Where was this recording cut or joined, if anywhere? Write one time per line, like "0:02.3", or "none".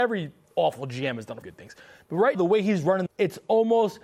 0:01.4
0:02.3
0:03.1